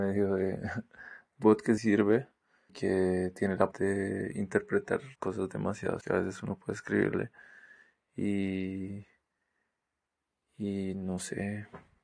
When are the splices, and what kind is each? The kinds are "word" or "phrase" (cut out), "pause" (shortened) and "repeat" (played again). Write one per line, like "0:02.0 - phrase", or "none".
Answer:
0:01.4 - word
0:01.8 - word
0:02.7 - word
0:03.7 - word
0:05.1 - pause
0:06.0 - word